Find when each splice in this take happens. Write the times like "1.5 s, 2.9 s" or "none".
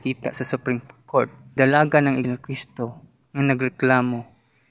1.6 s, 2.2 s, 3.2 s